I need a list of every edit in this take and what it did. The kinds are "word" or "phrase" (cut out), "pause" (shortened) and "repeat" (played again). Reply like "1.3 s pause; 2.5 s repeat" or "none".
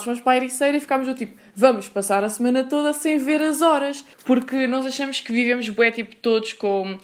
4.1 s pause

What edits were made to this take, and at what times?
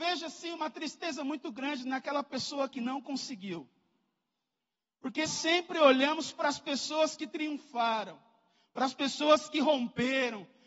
5.3 s word

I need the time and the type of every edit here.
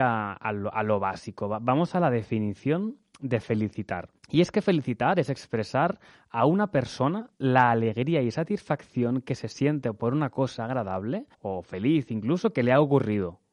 4.2 s pause; 11.3 s pause

